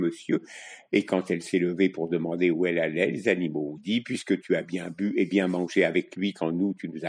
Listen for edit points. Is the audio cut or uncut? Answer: uncut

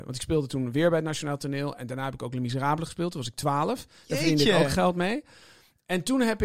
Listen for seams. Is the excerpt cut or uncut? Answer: uncut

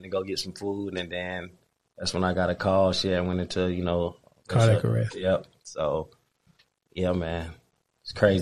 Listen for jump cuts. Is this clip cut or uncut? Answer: uncut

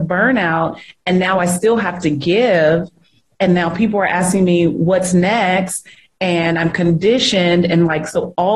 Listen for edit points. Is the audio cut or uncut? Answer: uncut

